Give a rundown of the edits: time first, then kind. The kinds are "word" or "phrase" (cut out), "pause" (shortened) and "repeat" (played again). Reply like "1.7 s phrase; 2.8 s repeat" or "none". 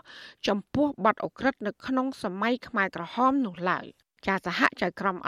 4.1 s pause